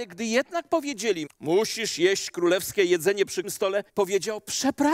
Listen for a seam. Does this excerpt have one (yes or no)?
yes